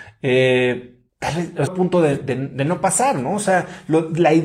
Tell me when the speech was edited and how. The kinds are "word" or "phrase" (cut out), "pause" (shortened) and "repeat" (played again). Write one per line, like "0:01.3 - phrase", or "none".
0:01.1 - pause
0:01.7 - word